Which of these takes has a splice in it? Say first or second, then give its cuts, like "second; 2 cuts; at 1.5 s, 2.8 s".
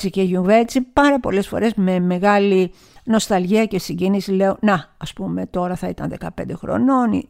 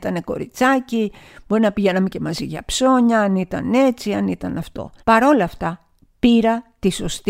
second; 1 cut; at 5.0 s